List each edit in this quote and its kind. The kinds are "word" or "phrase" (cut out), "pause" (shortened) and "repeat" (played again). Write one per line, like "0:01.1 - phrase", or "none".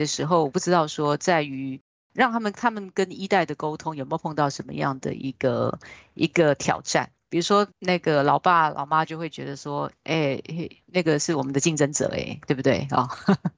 0:07.2 - pause
0:07.7 - pause
0:10.8 - pause